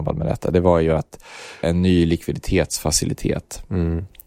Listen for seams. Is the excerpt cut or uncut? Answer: cut